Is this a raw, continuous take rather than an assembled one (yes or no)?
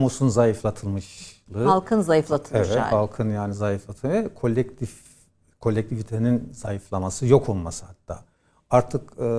yes